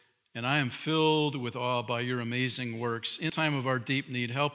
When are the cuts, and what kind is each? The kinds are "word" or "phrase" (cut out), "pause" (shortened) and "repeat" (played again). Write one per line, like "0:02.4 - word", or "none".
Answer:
0:03.3 - word